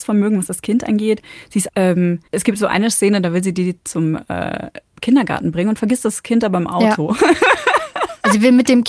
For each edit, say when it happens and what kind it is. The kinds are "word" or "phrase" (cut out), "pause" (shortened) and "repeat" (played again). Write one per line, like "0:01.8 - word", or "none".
0:01.7 - word
0:02.3 - pause
0:04.9 - pause